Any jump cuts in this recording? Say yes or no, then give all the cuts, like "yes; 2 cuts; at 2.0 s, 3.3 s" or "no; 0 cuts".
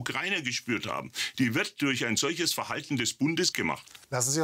yes; 1 cut; at 3.5 s